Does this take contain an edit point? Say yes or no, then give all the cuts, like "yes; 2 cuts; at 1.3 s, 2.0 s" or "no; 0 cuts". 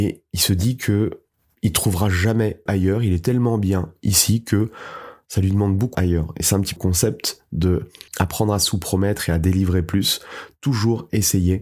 yes; 5 cuts; at 1.3 s, 2.7 s, 5.9 s, 6.8 s, 8.1 s